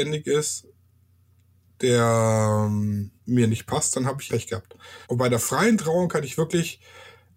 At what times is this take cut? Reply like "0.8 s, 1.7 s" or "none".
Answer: 3.2 s, 4.3 s, 5.0 s

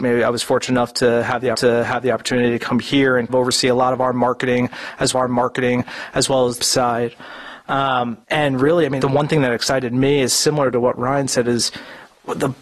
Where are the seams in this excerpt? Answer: 1.5 s, 3.3 s, 5.1 s, 6.6 s, 8.2 s, 9.0 s

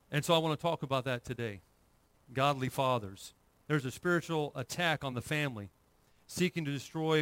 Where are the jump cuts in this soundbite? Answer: none

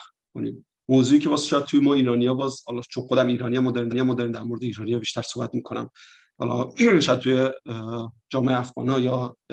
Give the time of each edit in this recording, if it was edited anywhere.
3.9 s

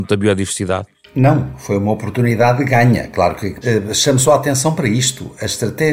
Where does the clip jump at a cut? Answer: 1.0 s, 3.6 s

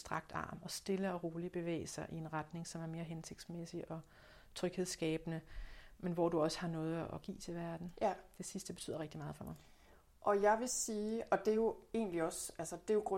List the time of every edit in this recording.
none

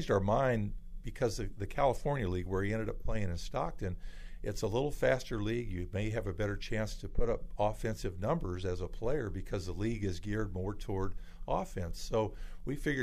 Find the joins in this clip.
none

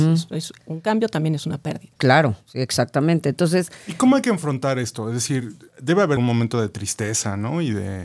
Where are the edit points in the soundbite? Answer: 2.0 s, 5.7 s, 6.2 s

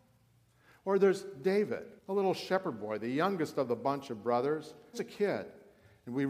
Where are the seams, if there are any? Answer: 2.0 s, 4.9 s

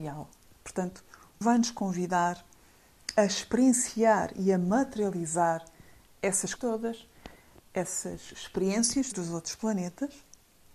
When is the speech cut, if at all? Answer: 1.4 s, 6.6 s, 9.1 s

